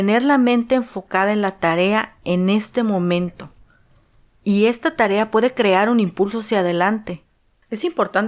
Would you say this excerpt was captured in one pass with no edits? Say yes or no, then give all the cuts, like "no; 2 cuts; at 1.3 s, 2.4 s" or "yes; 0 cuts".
yes; 0 cuts